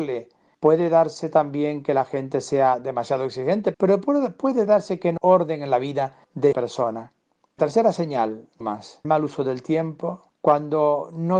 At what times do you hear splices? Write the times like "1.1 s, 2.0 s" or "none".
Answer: 3.7 s, 5.2 s, 6.5 s, 7.6 s, 8.6 s, 9.0 s